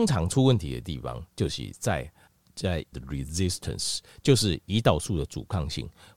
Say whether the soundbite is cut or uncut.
cut